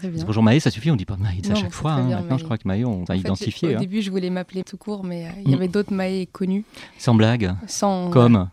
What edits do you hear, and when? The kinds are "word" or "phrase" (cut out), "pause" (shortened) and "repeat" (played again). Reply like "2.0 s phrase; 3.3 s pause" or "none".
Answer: 1.4 s phrase; 3.1 s word; 4.6 s word